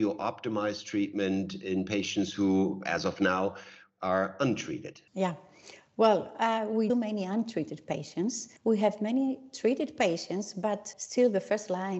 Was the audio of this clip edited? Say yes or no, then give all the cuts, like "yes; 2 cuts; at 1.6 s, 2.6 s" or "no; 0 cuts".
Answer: yes; 4 cuts; at 5.1 s, 6.9 s, 8.6 s, 10.9 s